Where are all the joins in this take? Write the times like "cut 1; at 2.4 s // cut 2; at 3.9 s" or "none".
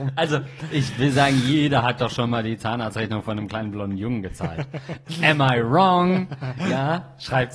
none